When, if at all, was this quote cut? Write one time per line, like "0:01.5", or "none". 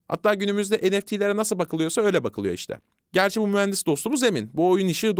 none